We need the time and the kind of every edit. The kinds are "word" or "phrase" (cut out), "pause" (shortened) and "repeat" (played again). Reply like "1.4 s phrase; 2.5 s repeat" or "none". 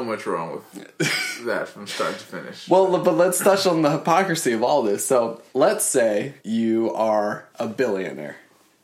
5.5 s pause; 6.4 s pause; 7.5 s pause